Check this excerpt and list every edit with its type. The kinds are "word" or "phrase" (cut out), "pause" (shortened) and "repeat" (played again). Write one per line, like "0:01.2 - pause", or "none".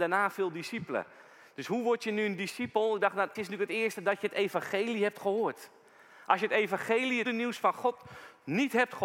0:03.3 - word
0:07.2 - word